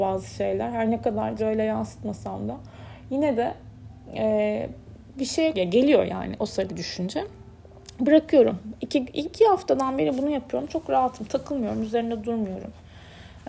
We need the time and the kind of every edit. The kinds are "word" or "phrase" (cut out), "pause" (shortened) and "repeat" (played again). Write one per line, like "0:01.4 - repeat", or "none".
0:01.4 - word
0:05.5 - word
0:06.7 - word
0:09.3 - word